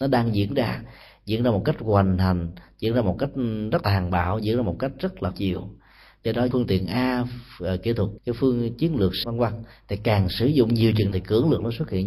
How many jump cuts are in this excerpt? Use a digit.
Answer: 6